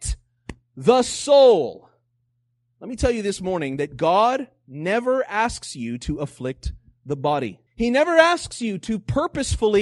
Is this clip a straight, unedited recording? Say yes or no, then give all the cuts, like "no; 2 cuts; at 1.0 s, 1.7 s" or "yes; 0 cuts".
no; 1 cut; at 7.7 s